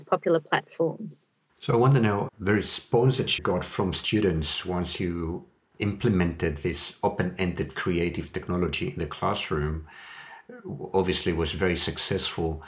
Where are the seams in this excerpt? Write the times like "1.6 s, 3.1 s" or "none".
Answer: 2.3 s, 3.4 s